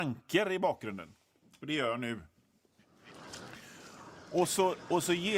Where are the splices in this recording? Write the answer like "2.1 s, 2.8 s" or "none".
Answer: none

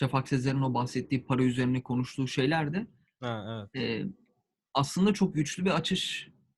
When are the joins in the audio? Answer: none

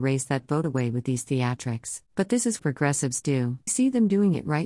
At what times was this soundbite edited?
2.1 s, 2.6 s, 3.7 s

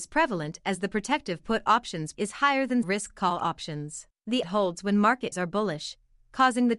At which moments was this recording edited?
2.1 s, 2.8 s, 4.4 s, 5.3 s

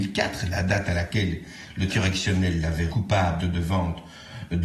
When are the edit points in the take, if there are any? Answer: 1.9 s, 2.9 s, 3.4 s

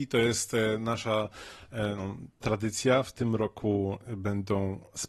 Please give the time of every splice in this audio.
2.4 s

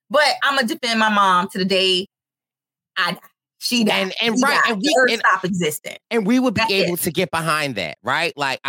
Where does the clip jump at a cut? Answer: 6.0 s

